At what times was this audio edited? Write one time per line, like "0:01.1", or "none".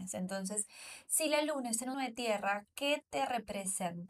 0:01.9